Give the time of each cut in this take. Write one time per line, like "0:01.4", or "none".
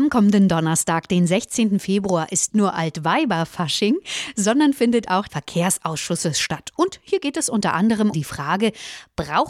0:02.5
0:05.3
0:08.1